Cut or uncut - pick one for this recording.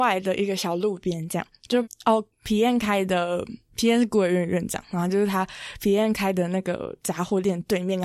cut